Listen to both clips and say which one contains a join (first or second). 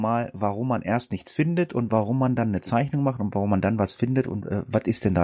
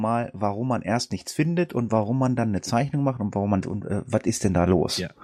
second